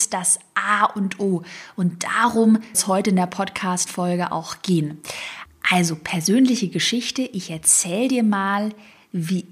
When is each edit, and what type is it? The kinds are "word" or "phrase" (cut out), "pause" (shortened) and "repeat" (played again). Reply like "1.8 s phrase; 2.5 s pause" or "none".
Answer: 2.7 s word